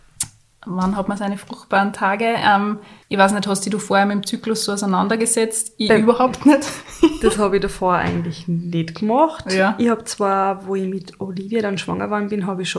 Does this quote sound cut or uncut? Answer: cut